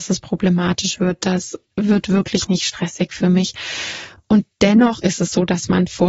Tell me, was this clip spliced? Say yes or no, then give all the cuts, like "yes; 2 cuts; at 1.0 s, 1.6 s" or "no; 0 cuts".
no; 0 cuts